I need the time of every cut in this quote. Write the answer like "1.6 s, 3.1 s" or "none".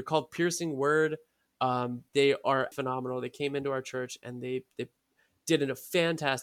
2.7 s

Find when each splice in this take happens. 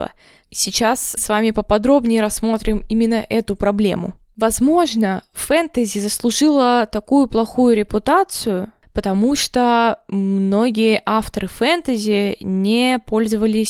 1.2 s

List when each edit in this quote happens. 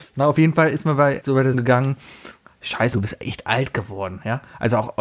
1.2 s, 1.5 s, 2.9 s

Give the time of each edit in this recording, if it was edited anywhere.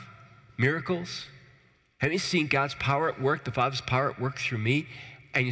none

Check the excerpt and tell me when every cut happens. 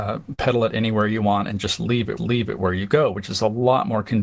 2.2 s

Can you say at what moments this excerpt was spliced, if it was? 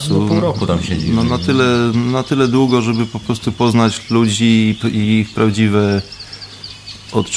none

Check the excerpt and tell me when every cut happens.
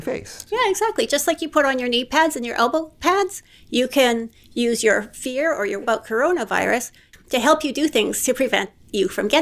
5.8 s

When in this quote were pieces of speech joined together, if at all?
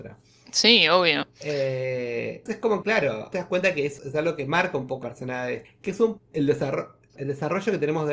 2.5 s, 2.8 s, 3.3 s, 4.0 s, 5.0 s, 5.6 s, 6.2 s, 7.2 s

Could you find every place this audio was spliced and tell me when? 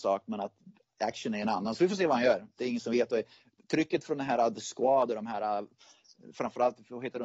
none

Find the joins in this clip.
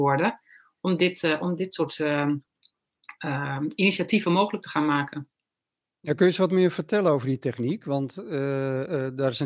none

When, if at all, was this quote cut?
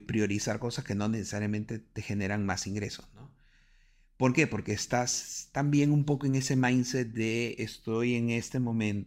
none

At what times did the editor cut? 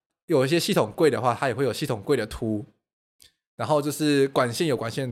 none

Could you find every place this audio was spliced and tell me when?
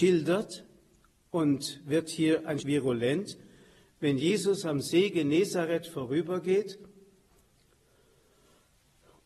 2.6 s

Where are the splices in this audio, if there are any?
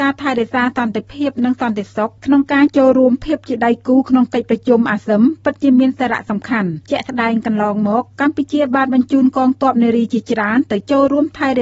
2.2 s, 6.8 s

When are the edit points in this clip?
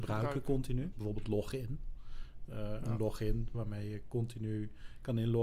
0.9 s, 3.5 s

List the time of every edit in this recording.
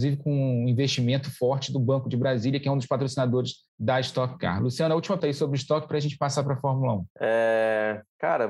3.7 s, 5.2 s, 7.1 s

